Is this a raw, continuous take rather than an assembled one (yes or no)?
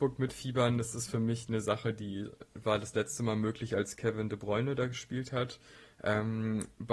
yes